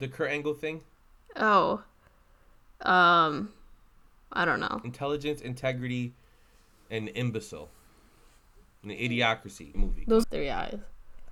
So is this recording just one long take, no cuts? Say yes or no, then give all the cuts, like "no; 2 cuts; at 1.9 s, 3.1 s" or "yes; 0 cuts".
no; 2 cuts; at 9.7 s, 10.2 s